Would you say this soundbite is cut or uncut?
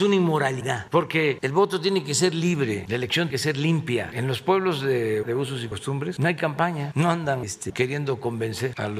cut